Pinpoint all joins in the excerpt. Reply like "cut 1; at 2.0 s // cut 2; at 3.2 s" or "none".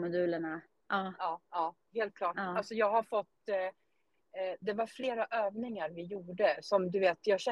cut 1; at 1.4 s